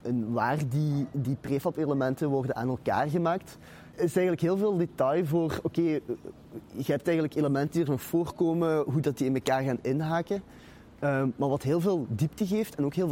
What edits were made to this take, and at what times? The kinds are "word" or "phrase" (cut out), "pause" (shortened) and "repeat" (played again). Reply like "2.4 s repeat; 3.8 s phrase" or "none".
none